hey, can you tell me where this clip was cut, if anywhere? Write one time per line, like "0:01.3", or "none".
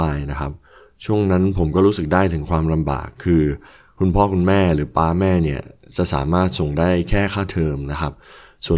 none